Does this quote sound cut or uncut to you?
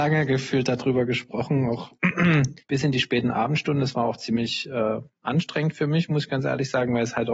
cut